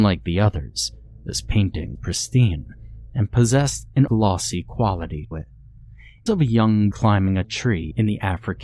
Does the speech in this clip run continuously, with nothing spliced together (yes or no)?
no